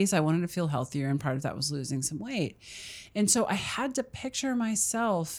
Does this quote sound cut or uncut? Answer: uncut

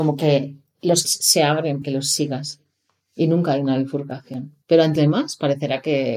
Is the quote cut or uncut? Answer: cut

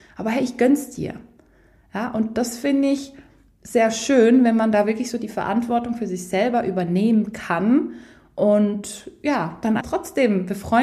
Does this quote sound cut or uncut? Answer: cut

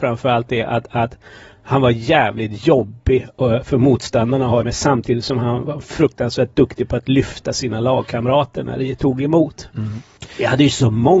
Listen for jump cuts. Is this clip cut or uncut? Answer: cut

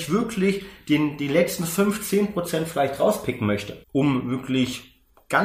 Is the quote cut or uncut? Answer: cut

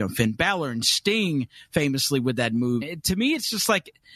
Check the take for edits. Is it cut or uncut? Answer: cut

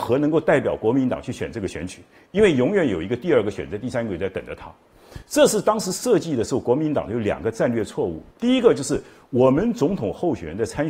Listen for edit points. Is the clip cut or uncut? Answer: uncut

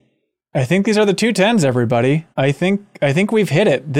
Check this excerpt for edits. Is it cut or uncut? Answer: cut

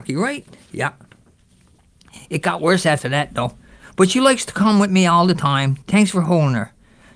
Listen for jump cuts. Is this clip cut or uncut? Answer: cut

